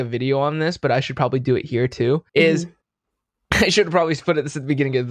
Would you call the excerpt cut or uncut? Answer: cut